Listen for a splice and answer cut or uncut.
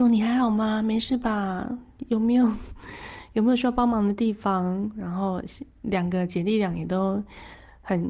uncut